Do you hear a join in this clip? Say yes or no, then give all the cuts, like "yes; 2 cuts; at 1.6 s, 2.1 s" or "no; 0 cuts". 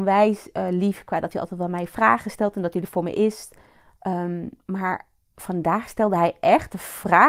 no; 0 cuts